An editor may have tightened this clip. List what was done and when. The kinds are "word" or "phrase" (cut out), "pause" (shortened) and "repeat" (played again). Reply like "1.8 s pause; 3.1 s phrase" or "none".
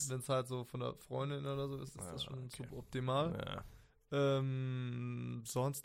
none